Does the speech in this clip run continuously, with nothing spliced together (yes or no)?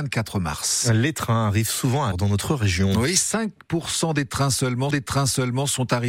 no